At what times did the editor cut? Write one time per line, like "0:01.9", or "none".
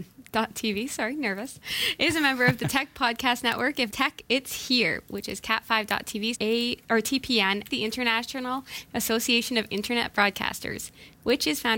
0:03.9
0:06.3
0:07.7